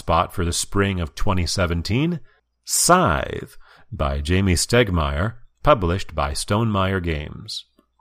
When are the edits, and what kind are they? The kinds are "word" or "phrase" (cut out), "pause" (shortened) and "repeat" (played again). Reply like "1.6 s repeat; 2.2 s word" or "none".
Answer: 2.4 s pause